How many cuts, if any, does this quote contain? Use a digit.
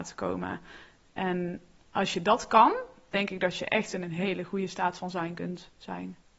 0